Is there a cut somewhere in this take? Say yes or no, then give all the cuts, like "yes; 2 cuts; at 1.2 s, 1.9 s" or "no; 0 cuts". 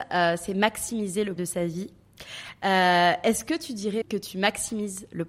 yes; 2 cuts; at 1.4 s, 4.0 s